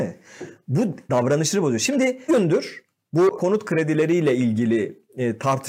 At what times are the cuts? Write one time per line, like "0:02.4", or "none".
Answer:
0:01.1
0:02.3
0:03.4